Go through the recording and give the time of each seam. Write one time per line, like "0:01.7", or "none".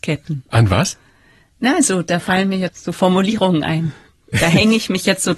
none

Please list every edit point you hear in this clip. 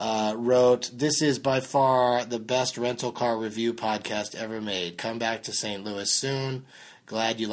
none

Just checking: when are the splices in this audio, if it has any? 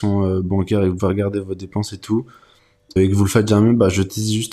0:01.0
0:03.0

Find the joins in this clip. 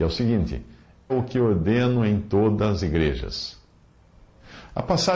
0:01.1
0:02.8

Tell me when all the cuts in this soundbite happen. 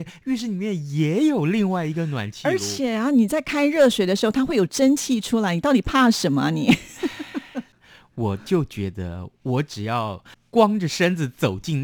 0:10.3

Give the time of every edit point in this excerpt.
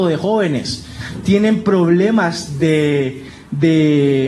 none

